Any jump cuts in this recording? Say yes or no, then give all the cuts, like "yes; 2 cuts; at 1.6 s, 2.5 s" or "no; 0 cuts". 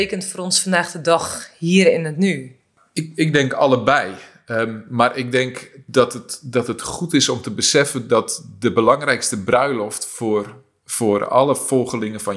no; 0 cuts